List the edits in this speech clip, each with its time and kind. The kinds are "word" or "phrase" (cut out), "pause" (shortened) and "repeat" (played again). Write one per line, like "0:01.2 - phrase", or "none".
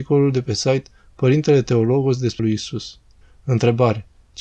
0:02.4 - word
0:03.2 - pause